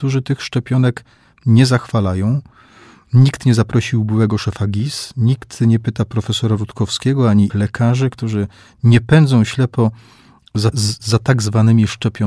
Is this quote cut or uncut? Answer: cut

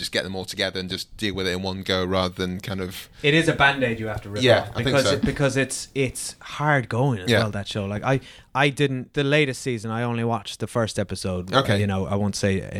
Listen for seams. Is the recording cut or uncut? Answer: uncut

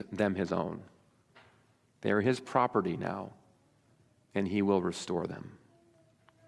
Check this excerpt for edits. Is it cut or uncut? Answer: uncut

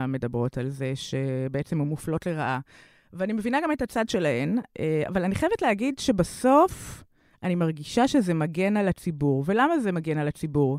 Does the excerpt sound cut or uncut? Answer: uncut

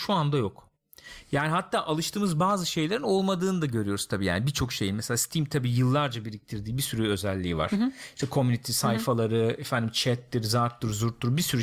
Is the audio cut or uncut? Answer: uncut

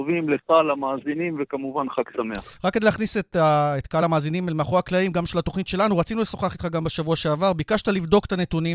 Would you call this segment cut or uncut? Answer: uncut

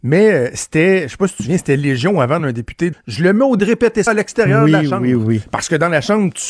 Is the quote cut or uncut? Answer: cut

